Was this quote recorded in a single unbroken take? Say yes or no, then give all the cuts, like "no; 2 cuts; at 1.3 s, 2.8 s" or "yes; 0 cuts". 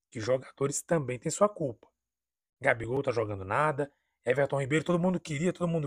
yes; 0 cuts